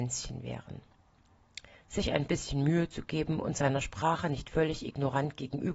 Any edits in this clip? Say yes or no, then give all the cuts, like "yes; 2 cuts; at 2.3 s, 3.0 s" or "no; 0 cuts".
no; 0 cuts